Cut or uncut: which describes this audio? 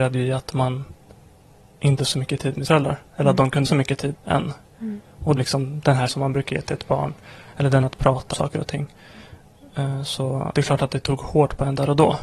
cut